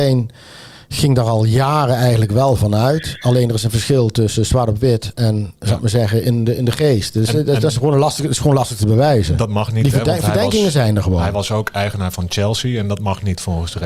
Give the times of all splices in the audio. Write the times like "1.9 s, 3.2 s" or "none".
none